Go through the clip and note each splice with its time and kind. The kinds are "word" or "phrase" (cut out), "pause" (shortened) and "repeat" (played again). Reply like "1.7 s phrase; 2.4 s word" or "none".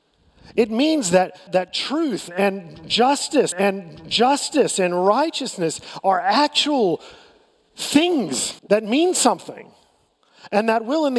1.5 s word; 3.5 s repeat; 8.6 s pause